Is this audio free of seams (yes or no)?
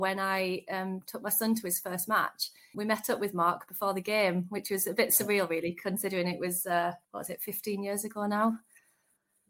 no